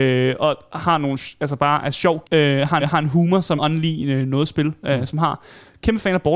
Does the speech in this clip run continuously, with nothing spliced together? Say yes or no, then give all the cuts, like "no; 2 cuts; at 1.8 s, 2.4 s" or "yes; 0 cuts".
no; 3 cuts; at 2.2 s, 2.8 s, 3.6 s